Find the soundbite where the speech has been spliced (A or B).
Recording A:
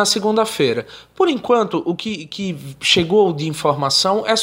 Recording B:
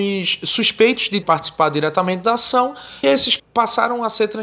B